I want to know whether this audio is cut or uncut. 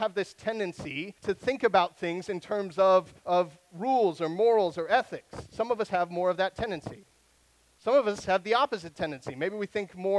cut